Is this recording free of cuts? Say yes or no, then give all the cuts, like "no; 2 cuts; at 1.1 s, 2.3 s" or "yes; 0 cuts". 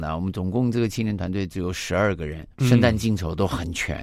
no; 1 cut; at 2.5 s